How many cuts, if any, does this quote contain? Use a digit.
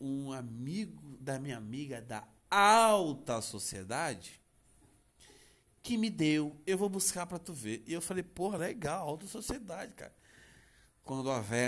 0